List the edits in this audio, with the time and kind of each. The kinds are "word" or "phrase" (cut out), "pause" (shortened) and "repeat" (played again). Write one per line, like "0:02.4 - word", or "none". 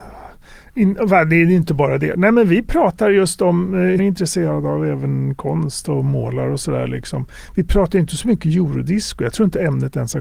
0:04.0 - phrase